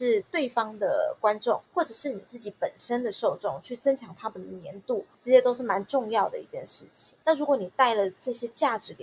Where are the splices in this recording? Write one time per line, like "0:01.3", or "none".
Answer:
0:01.7
0:05.1
0:07.2